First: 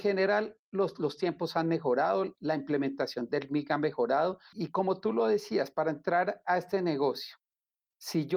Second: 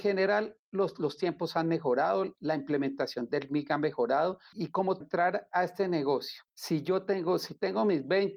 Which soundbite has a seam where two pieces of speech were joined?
second; 2 cuts; at 5.0 s, 6.5 s

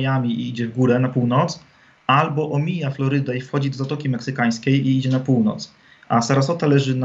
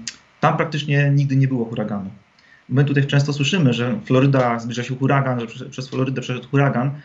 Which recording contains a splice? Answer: second; 1 cut; at 3.1 s

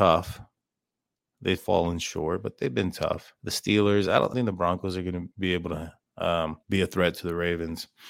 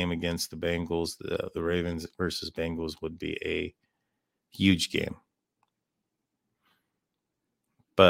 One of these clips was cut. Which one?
first; 5 cuts; at 1.6 s, 3.4 s, 4.3 s, 5.3 s, 6.6 s

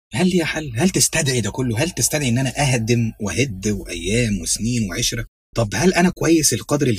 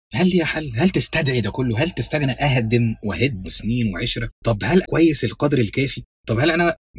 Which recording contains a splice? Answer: second; 4 cuts; at 2.2 s, 3.4 s, 4.3 s, 4.8 s

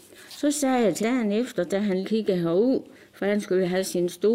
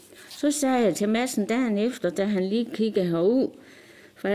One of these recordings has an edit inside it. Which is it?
first; 3 cuts; at 1.0 s, 2.0 s, 2.9 s

